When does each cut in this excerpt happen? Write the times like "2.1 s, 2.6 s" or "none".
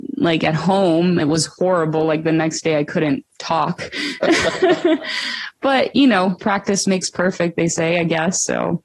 1.2 s

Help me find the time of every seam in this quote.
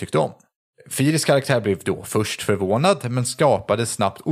none

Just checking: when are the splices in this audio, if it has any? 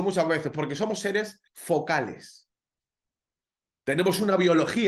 1.5 s

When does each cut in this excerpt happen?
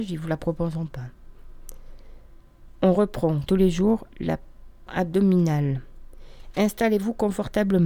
3.5 s, 4.9 s

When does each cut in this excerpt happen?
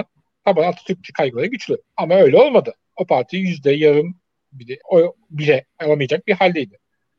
1.1 s, 1.8 s, 4.8 s

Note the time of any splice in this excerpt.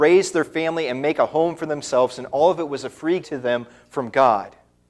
3.2 s

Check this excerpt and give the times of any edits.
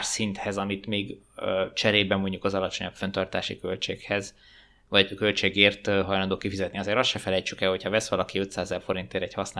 none

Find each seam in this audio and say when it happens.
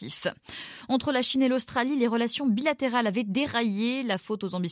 none

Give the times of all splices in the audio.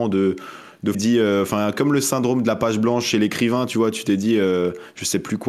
0.9 s

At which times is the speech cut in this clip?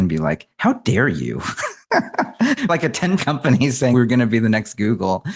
1.8 s, 2.7 s, 3.2 s, 3.9 s

